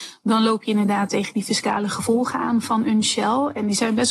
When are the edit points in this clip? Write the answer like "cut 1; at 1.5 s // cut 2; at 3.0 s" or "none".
none

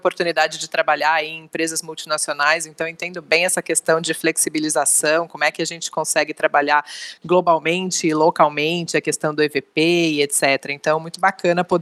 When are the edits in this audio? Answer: none

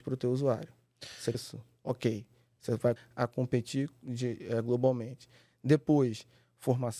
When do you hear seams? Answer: cut 1; at 1.3 s // cut 2; at 3.0 s

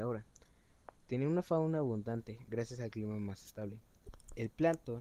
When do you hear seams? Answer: none

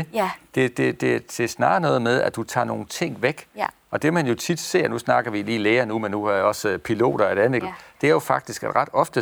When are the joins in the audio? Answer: cut 1; at 7.6 s

